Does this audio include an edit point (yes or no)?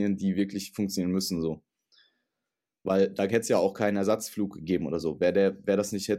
no